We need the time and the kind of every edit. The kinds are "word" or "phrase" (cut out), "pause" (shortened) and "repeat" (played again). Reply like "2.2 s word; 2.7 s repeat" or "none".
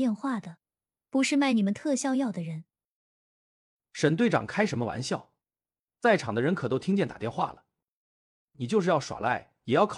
none